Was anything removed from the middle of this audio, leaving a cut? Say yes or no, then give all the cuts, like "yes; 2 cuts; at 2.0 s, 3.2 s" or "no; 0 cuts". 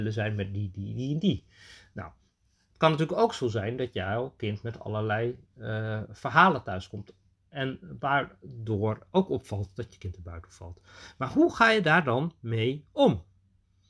no; 0 cuts